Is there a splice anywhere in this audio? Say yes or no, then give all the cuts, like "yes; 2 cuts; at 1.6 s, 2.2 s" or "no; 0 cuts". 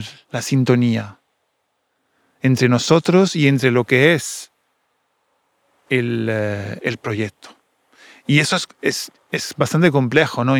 no; 0 cuts